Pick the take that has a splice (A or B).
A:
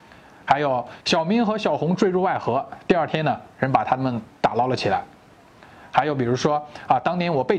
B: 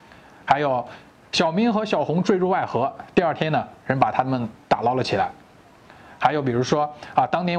A